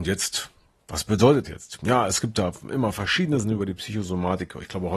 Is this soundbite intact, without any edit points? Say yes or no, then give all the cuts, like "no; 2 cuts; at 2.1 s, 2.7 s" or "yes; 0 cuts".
no; 2 cuts; at 1.4 s, 3.4 s